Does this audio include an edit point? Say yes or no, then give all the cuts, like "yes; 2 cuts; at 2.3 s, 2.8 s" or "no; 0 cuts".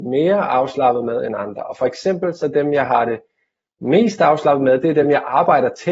no; 0 cuts